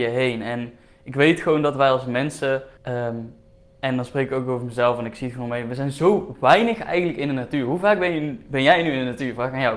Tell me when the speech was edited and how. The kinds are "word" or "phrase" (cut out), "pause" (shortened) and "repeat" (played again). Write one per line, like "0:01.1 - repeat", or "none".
0:02.8 - pause